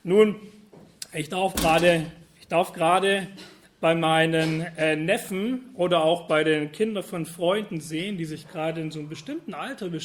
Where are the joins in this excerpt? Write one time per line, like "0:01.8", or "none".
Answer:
none